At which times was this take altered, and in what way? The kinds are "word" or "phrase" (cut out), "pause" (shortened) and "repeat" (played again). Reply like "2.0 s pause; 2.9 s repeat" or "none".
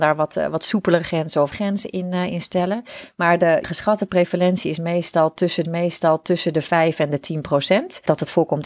1.5 s word; 5.6 s repeat